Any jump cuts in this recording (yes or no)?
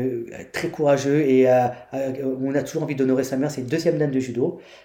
no